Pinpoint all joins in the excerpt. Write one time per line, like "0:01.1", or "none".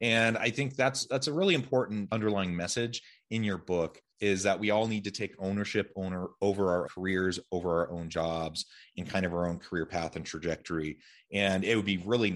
0:02.1
0:04.1
0:06.8